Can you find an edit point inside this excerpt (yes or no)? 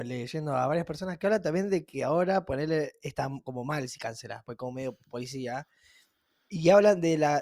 no